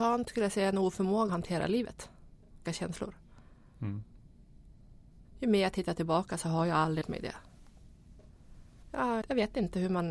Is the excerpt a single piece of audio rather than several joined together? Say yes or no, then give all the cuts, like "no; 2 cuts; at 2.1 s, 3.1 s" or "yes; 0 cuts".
no; 4 cuts; at 1.3 s, 2.6 s, 7.0 s, 9.2 s